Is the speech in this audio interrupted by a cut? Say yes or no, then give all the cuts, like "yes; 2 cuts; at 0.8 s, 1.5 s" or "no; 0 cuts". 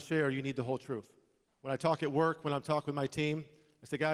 yes; 1 cut; at 1.5 s